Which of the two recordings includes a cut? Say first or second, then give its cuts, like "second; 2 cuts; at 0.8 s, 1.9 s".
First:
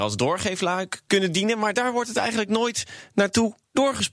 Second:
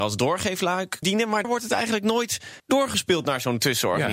second; 3 cuts; at 1.0 s, 1.4 s, 2.6 s